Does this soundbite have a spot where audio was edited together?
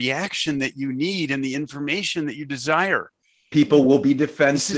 no; 0 cuts

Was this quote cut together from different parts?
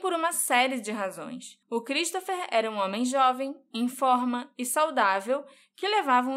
yes; 1 cut; at 1.6 s

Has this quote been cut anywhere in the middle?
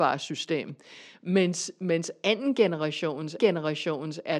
yes; 1 cut; at 3.4 s

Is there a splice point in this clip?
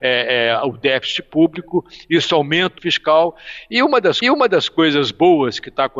yes; 2 cuts; at 2.8 s, 4.2 s

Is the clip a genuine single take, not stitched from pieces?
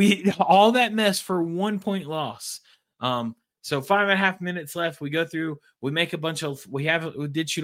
yes; 0 cuts

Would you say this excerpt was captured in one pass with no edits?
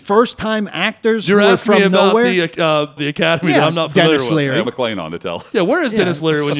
no; 2 cuts; at 3.0 s, 4.6 s

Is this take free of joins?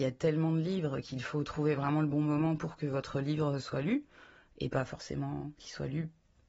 yes; 0 cuts

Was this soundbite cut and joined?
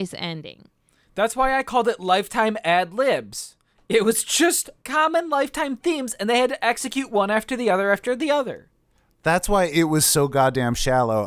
no; 0 cuts

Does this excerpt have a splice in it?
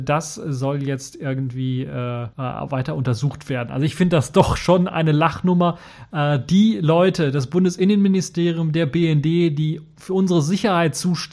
yes; 1 cut; at 2.3 s

